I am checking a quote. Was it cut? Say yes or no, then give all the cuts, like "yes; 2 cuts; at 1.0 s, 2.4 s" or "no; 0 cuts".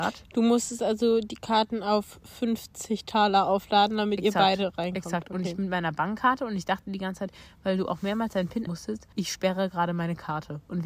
yes; 2 cuts; at 8.7 s, 9.1 s